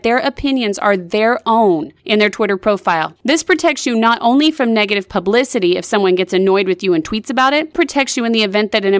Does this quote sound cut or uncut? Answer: cut